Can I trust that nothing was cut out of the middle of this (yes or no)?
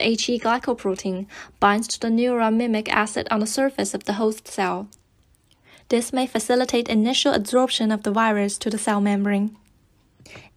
yes